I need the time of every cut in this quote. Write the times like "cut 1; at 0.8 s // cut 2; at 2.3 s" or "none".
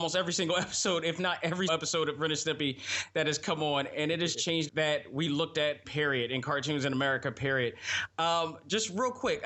cut 1; at 1.7 s // cut 2; at 4.3 s // cut 3; at 4.7 s // cut 4; at 5.8 s